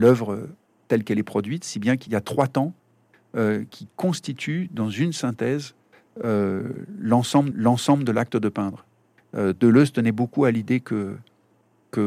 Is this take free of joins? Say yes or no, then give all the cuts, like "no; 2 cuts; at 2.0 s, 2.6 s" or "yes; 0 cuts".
no; 3 cuts; at 2.1 s, 3.7 s, 7.5 s